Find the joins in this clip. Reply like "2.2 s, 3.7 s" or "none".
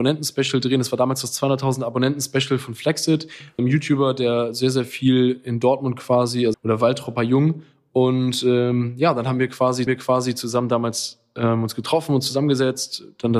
3.6 s, 6.5 s, 9.9 s